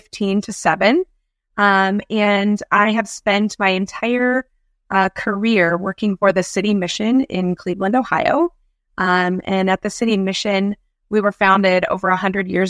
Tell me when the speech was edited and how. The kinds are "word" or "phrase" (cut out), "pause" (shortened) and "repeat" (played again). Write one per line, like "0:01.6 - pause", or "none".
none